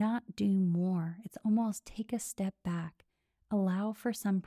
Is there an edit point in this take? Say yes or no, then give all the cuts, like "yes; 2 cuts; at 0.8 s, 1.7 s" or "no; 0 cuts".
no; 0 cuts